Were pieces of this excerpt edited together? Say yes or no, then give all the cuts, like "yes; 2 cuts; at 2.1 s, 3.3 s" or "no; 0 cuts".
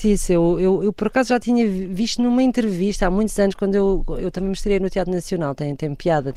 yes; 1 cut; at 4.2 s